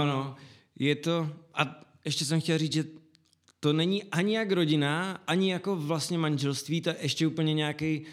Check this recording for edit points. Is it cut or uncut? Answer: uncut